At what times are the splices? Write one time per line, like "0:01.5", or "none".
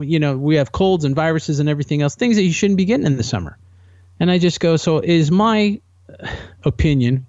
none